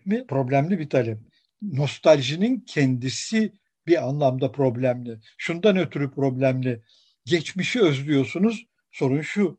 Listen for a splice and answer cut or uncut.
uncut